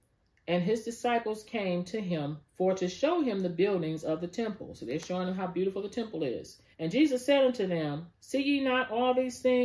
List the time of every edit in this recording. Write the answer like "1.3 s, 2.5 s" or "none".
2.5 s, 6.7 s, 8.1 s